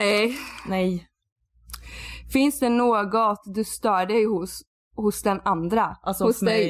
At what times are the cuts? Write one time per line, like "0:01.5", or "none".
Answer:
none